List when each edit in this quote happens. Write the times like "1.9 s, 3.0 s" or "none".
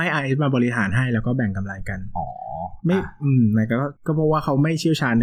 4.0 s

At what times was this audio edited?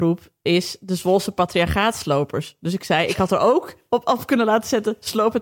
none

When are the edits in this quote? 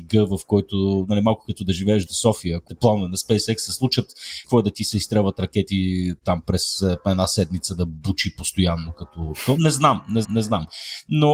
2.1 s, 2.7 s, 4.4 s, 10.2 s

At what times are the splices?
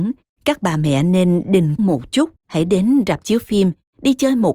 1.8 s, 2.4 s

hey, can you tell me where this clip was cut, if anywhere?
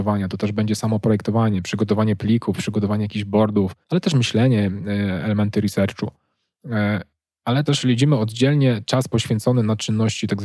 3.8 s, 7.7 s

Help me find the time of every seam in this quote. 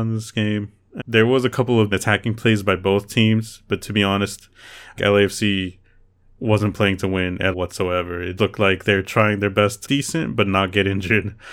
1.0 s, 1.9 s, 5.0 s, 7.5 s, 8.4 s, 9.9 s

